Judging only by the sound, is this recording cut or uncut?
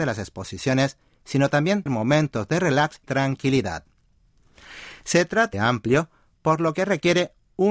cut